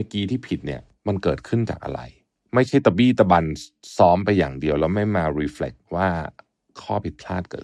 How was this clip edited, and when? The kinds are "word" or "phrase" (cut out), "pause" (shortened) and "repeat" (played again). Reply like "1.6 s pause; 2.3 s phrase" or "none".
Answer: 5.8 s pause